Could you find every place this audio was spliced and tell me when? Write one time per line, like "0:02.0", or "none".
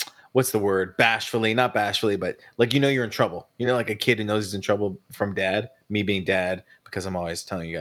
none